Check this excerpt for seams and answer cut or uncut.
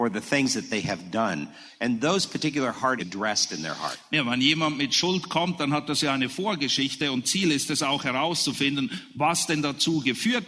cut